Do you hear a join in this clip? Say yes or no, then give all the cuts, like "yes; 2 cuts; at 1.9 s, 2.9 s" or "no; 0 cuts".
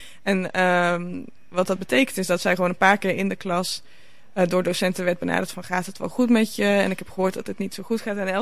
no; 0 cuts